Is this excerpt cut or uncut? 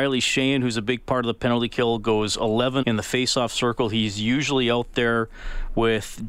cut